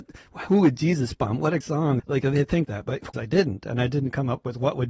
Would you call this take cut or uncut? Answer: cut